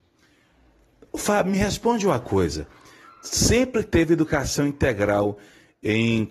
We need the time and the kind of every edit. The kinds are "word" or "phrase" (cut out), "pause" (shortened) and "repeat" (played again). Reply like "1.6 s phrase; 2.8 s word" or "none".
none